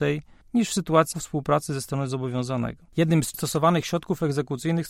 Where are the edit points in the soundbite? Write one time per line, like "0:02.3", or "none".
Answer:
0:01.1
0:02.9
0:03.3

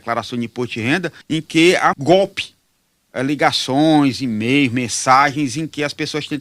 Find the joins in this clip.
0:01.2
0:01.9

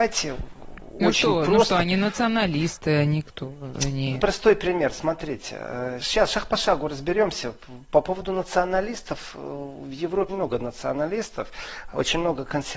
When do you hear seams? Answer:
0:04.2
0:06.0
0:10.3

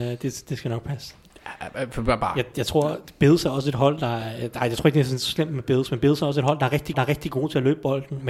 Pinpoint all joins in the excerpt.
0:02.5
0:06.9

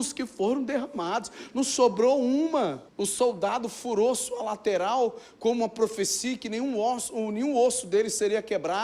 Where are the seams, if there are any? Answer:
0:02.9

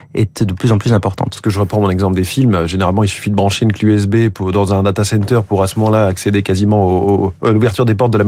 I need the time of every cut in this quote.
none

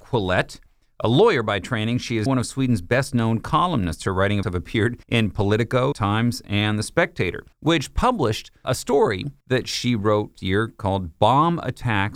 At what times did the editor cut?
0:02.3
0:04.4
0:05.0
0:05.9
0:07.5
0:08.6
0:09.4
0:10.4

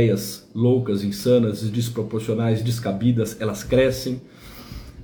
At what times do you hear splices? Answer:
none

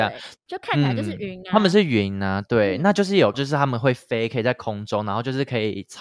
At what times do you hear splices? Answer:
0:03.3

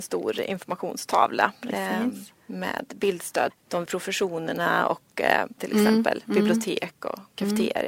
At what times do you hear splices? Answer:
0:02.3
0:03.5
0:03.9
0:05.6

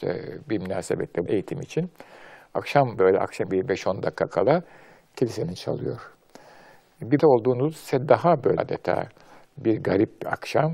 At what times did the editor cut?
0:01.3
0:03.0
0:03.5
0:05.6
0:07.2
0:08.6

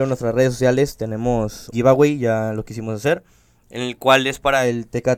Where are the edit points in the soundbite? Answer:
0:01.7

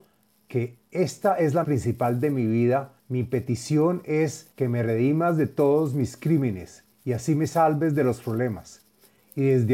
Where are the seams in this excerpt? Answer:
0:01.6
0:03.0
0:04.5
0:06.9

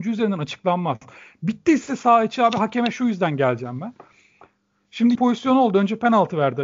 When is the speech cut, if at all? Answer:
0:05.1

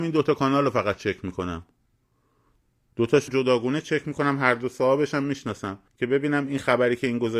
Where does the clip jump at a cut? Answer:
0:03.3
0:05.9

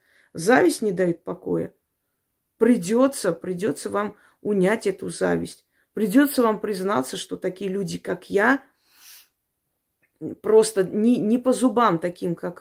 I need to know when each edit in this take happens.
none

